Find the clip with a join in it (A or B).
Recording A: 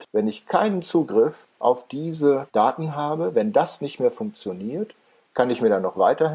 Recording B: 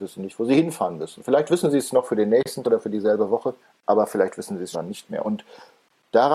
B